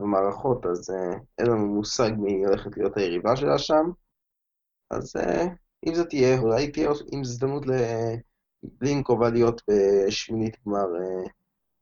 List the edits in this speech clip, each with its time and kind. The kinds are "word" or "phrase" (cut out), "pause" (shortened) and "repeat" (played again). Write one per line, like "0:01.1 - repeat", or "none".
0:06.4 - word